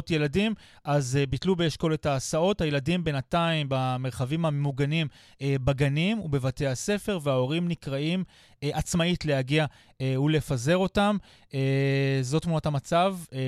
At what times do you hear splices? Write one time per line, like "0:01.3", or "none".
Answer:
none